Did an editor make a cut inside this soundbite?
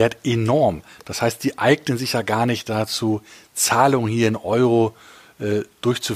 no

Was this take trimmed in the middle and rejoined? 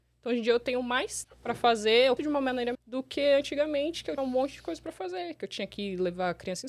yes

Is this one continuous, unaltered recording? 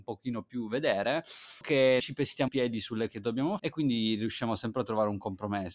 no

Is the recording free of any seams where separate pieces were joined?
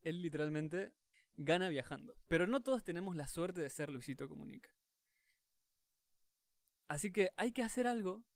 no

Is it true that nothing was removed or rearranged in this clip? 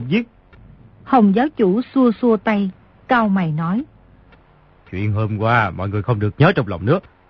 yes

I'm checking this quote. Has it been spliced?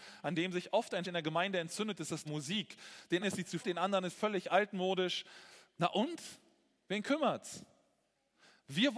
yes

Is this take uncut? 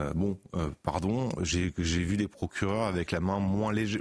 yes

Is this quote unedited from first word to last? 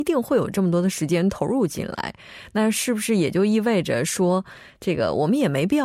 yes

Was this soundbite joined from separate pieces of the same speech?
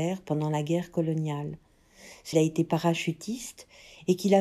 yes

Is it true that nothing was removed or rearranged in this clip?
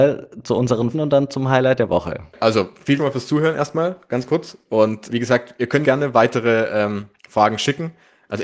no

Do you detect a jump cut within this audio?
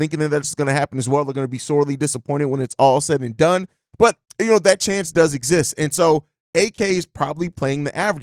no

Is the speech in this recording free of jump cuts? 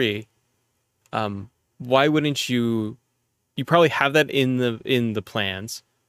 yes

